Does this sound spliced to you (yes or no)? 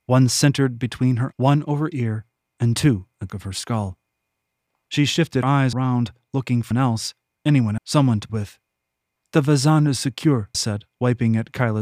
yes